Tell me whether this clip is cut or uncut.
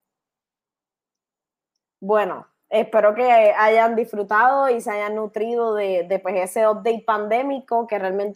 uncut